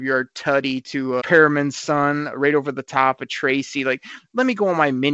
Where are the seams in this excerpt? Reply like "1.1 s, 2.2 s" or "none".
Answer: 1.2 s